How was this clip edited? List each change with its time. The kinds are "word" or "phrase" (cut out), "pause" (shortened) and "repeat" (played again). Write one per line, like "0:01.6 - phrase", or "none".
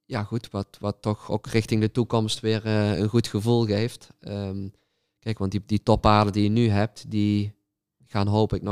none